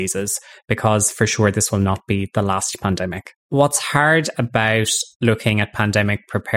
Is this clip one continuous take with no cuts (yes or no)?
no